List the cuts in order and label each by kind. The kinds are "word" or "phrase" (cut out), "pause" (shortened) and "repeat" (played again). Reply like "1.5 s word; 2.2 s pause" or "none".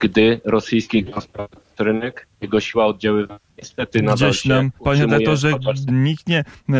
1.8 s phrase; 2.3 s pause; 3.5 s pause; 4.8 s pause; 5.9 s word